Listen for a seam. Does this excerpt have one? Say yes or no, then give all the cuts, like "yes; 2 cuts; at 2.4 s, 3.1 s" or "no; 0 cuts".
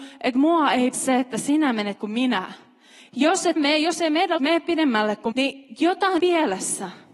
yes; 6 cuts; at 0.9 s, 2.0 s, 3.6 s, 4.4 s, 5.3 s, 6.2 s